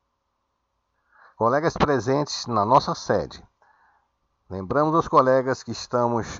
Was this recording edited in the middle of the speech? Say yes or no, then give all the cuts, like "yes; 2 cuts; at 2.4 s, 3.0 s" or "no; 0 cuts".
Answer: no; 0 cuts